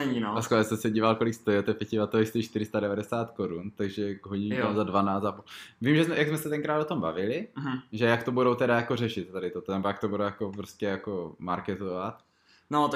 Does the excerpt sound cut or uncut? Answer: uncut